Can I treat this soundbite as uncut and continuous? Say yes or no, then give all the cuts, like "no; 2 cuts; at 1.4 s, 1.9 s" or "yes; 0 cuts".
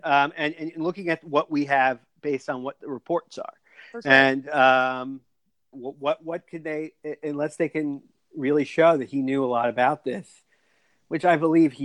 no; 1 cut; at 5.7 s